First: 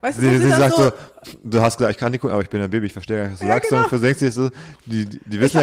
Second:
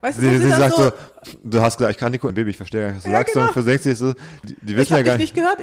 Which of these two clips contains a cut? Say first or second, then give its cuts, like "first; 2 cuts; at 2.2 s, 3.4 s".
second; 2 cuts; at 2.3 s, 4.4 s